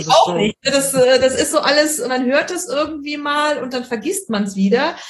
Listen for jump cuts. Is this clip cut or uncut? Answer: cut